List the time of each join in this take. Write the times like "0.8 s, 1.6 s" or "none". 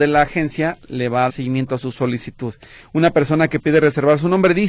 1.3 s